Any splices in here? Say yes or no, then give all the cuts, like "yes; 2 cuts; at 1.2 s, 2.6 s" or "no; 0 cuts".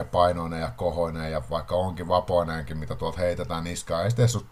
no; 0 cuts